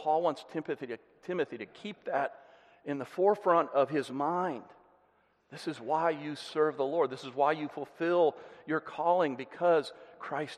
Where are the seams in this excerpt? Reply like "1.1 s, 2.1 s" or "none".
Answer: none